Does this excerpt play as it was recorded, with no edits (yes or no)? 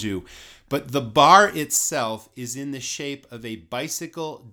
yes